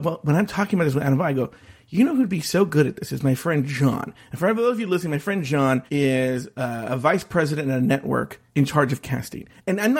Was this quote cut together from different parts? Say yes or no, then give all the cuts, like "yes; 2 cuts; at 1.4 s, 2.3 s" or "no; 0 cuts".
yes; 2 cuts; at 5.9 s, 8.5 s